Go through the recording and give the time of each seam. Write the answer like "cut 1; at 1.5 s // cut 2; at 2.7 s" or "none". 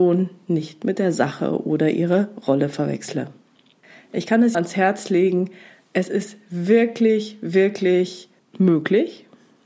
cut 1; at 4.5 s